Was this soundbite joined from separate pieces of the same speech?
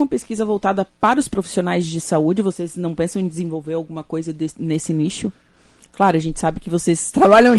no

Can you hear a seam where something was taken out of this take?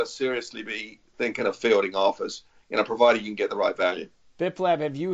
no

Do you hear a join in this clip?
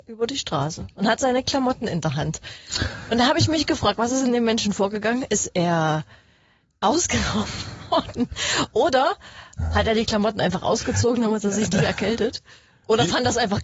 no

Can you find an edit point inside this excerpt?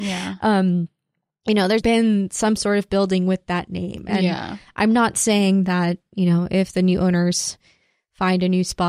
yes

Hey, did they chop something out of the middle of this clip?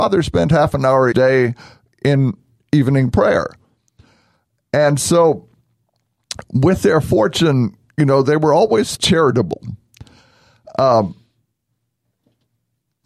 yes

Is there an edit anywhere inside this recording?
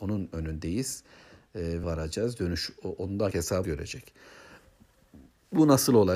yes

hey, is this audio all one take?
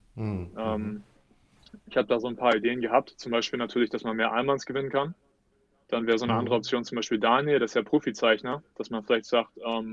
yes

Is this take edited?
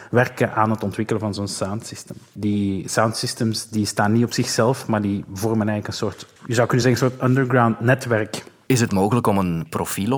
no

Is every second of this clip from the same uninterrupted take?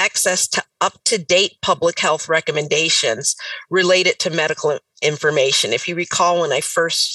yes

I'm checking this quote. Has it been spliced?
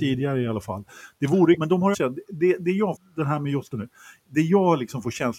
yes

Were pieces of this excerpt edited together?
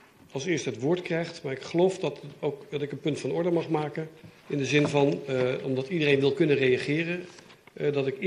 yes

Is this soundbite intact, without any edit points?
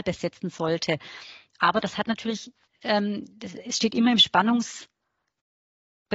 no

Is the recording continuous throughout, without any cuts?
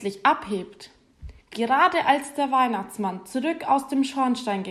no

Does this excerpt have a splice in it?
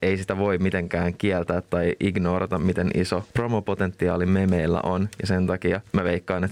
no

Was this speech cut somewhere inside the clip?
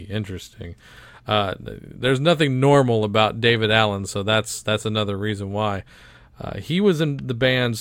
no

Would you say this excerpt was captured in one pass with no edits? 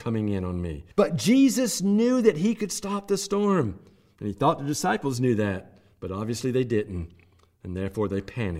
no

